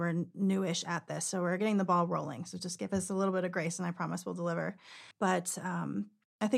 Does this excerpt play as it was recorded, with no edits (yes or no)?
no